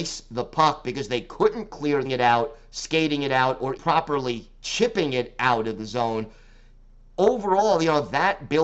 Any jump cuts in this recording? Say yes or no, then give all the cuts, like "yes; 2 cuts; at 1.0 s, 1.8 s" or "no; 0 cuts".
yes; 2 cuts; at 2.0 s, 3.8 s